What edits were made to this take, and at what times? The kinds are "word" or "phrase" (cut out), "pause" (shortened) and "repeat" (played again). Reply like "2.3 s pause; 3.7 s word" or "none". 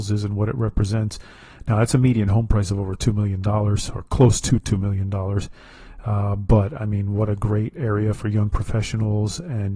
none